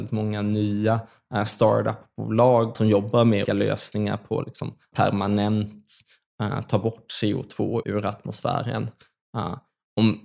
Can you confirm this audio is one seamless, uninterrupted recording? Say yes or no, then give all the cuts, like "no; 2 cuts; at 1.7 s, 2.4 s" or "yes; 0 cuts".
no; 4 cuts; at 2.7 s, 3.4 s, 4.9 s, 7.8 s